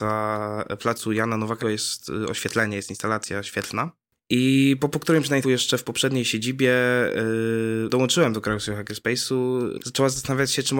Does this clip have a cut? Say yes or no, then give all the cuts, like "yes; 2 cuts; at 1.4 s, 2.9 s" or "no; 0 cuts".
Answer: yes; 5 cuts; at 1.6 s, 4.9 s, 5.4 s, 7.9 s, 9.8 s